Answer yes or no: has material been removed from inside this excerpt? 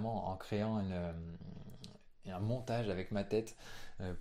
no